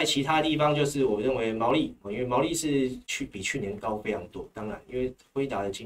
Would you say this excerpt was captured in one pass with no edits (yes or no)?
no